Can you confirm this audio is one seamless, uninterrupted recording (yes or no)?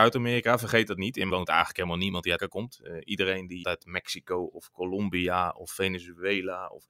no